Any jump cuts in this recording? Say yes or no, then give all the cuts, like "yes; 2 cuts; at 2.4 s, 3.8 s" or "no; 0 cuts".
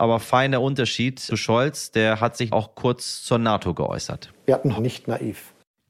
yes; 3 cuts; at 1.3 s, 2.5 s, 4.8 s